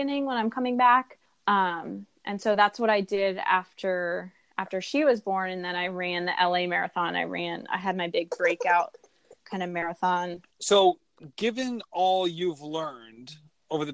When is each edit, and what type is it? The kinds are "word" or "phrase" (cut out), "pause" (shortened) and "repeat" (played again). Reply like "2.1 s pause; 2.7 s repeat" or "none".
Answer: 1.3 s pause; 10.5 s pause